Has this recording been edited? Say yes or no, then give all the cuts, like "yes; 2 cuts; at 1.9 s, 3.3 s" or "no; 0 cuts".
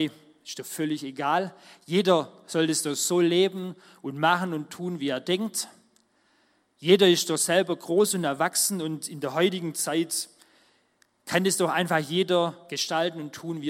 no; 0 cuts